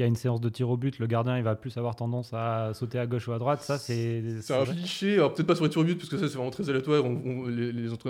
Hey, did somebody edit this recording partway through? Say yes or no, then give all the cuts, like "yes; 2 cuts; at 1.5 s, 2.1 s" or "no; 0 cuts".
yes; 1 cut; at 4.6 s